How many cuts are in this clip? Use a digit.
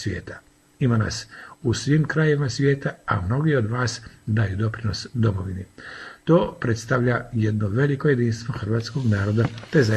0